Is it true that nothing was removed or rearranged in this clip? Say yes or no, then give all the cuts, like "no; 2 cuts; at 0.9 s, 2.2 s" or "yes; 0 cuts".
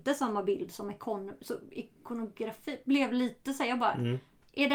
yes; 0 cuts